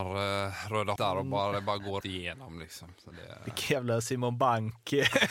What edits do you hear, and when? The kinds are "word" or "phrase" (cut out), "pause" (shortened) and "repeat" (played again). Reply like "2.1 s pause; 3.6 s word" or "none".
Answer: 1.0 s word; 2.0 s word